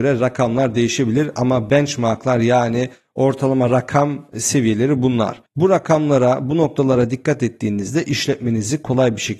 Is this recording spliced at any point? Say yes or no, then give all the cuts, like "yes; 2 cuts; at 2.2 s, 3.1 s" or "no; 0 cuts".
yes; 1 cut; at 5.5 s